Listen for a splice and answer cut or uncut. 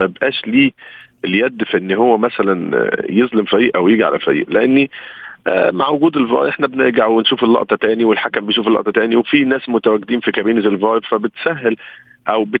uncut